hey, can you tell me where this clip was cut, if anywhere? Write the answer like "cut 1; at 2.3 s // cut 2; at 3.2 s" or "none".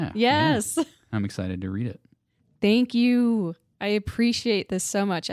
none